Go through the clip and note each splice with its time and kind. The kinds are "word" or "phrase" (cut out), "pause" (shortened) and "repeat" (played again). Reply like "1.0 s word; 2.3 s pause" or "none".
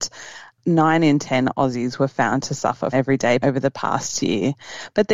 2.9 s word; 3.4 s word